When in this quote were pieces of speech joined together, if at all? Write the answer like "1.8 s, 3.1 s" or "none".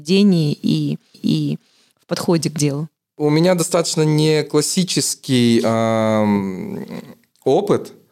1.1 s